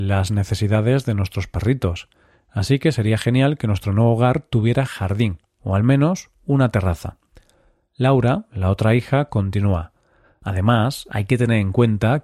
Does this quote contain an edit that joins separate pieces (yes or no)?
no